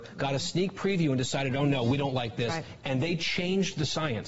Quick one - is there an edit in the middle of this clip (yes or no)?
no